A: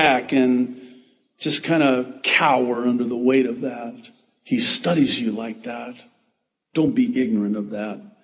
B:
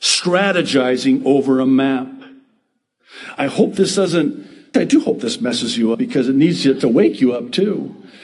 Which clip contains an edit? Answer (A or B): B